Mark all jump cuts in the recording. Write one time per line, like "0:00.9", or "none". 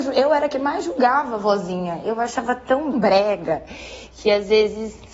0:02.9